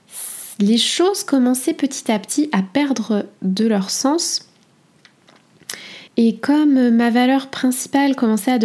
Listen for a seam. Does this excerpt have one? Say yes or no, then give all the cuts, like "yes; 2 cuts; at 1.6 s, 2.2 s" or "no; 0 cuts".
yes; 1 cut; at 6.1 s